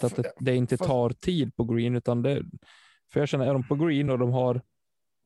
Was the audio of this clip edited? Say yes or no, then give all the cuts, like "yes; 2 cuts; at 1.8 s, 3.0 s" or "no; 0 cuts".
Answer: no; 0 cuts